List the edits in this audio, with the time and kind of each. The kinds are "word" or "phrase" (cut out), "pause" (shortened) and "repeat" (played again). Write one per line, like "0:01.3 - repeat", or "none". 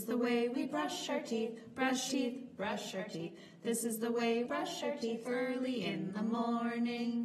0:02.1 - word
0:04.4 - word
0:05.2 - word